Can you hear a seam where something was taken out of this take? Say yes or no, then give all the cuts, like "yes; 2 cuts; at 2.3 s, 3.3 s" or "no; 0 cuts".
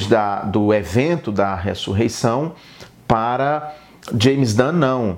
no; 0 cuts